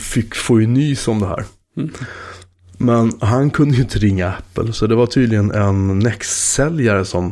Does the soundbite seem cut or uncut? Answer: uncut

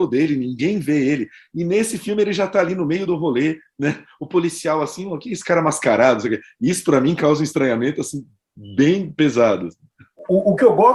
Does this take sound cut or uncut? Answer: uncut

